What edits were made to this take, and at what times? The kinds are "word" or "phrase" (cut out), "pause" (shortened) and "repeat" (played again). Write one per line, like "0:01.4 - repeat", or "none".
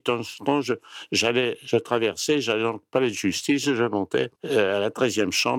0:04.4 - pause